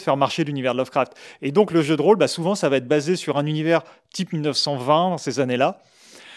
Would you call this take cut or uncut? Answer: uncut